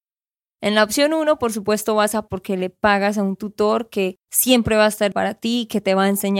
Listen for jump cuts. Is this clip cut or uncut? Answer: cut